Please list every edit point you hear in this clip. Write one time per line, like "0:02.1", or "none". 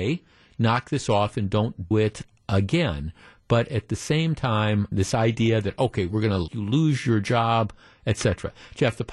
0:01.9
0:04.9
0:06.5